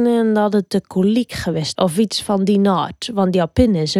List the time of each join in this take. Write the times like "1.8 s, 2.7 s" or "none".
1.7 s